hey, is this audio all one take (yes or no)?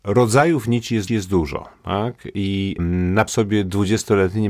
no